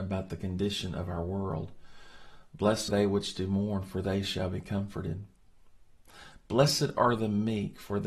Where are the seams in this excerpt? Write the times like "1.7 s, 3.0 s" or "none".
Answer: 2.9 s